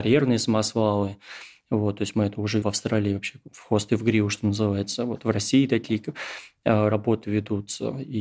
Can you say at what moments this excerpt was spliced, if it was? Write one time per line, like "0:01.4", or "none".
0:02.6